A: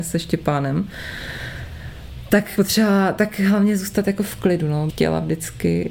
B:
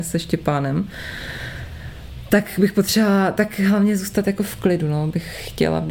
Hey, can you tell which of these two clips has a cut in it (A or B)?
A